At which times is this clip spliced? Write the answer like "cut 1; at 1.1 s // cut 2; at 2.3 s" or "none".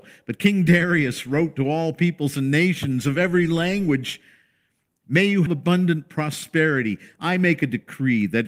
cut 1; at 5.5 s